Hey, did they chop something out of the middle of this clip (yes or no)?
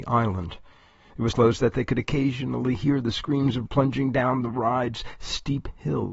yes